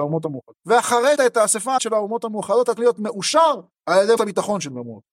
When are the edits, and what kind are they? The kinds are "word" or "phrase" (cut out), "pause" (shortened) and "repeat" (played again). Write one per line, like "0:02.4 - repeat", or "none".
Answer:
0:01.2 - word
0:01.8 - word
0:02.8 - word
0:04.2 - word